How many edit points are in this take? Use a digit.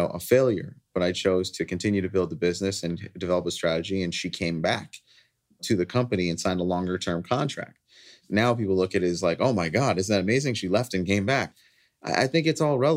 0